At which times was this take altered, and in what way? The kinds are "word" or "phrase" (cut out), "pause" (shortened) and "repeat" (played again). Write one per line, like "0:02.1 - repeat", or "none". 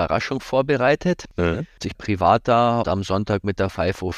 0:01.9 - phrase
0:02.8 - word